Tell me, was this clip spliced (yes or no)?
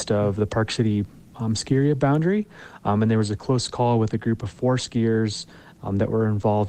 no